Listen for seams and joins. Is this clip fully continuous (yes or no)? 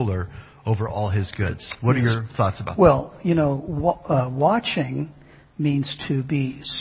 yes